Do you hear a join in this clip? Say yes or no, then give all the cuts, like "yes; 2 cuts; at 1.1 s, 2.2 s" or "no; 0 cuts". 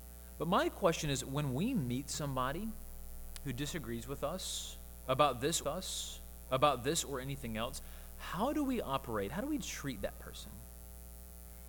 yes; 1 cut; at 5.6 s